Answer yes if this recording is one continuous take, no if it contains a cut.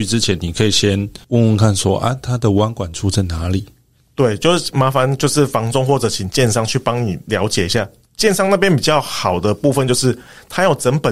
no